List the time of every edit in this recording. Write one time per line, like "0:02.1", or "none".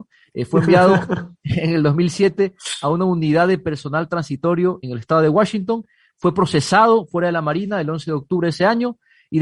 0:04.8